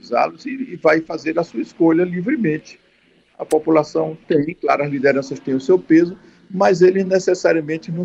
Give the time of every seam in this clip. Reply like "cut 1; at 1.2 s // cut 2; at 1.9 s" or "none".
none

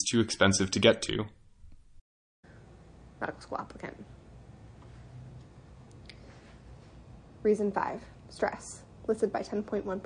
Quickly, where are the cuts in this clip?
none

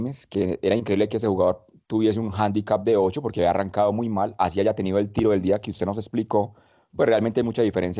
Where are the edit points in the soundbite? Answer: none

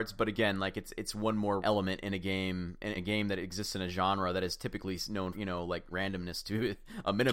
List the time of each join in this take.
cut 1; at 1.6 s // cut 2; at 2.9 s // cut 3; at 5.3 s // cut 4; at 5.9 s

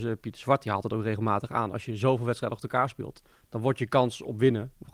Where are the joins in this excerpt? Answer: none

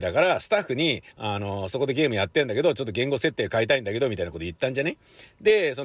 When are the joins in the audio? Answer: cut 1; at 1.1 s

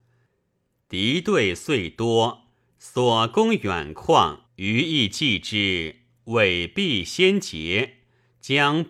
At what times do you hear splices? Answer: cut 1; at 4.5 s

